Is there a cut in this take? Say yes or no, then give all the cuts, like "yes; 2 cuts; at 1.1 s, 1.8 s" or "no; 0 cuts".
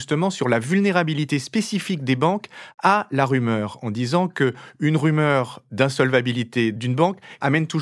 no; 0 cuts